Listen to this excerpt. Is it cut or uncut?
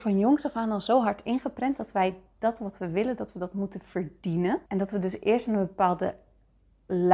cut